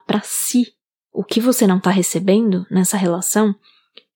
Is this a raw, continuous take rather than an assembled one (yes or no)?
yes